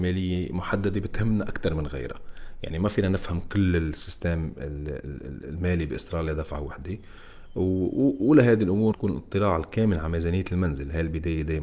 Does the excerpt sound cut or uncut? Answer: cut